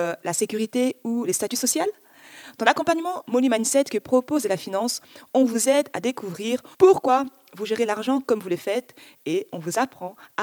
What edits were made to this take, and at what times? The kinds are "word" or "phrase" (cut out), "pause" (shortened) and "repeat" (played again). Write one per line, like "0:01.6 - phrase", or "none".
0:06.7 - pause